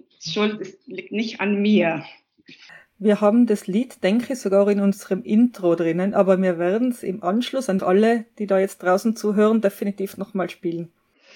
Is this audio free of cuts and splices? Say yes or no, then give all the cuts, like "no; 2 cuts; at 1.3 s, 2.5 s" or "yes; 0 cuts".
no; 2 cuts; at 2.7 s, 7.8 s